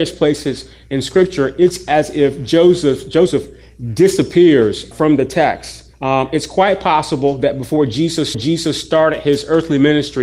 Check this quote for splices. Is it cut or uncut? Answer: cut